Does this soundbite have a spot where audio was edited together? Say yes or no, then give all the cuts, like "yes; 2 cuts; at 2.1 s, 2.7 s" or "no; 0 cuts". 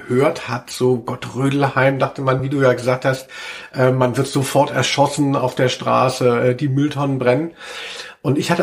no; 0 cuts